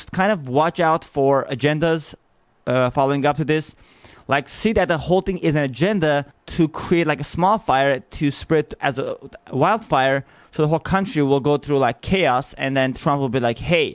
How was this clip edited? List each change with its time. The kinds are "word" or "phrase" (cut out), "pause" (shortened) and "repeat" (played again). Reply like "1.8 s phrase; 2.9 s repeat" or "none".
6.3 s pause